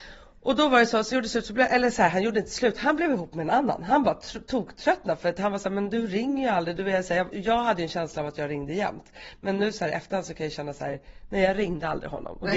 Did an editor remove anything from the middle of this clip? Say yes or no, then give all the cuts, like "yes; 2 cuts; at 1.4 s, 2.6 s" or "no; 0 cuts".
yes; 2 cuts; at 1.1 s, 7.3 s